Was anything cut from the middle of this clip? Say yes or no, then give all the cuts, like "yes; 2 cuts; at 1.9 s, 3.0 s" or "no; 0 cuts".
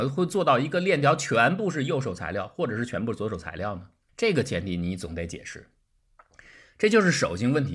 yes; 1 cut; at 4.1 s